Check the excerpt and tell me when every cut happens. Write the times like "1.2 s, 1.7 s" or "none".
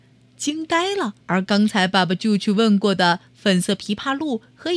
1.2 s